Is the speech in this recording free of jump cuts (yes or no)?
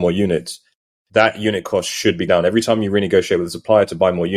no